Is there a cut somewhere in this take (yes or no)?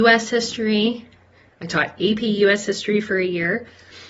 no